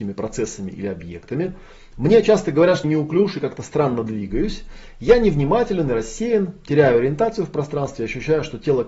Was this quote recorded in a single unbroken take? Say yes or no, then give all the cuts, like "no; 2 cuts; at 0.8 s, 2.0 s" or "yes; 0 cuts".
no; 1 cut; at 2.8 s